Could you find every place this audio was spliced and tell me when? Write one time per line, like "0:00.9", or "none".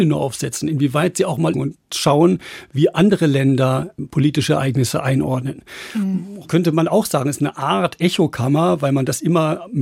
0:01.5
0:04.0